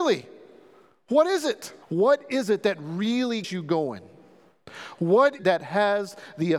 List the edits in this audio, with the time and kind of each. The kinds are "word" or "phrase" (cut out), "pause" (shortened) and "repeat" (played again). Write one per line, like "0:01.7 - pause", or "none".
0:01.8 - pause
0:03.4 - word
0:05.4 - phrase